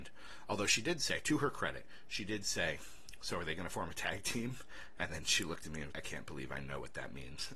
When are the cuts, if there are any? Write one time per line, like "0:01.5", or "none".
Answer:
0:05.9